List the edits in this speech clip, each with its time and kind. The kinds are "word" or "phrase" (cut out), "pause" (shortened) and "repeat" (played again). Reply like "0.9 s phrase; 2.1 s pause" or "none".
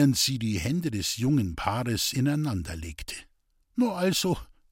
none